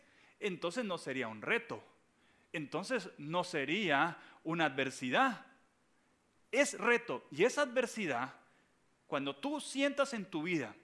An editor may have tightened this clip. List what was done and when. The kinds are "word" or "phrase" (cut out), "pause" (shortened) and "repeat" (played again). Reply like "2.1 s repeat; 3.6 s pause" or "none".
none